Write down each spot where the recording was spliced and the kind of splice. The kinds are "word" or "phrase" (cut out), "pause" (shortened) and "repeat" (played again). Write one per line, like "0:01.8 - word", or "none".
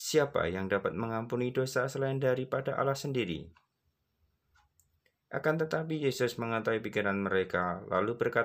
none